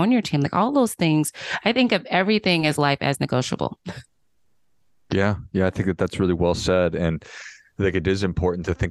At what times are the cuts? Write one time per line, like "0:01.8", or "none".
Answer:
none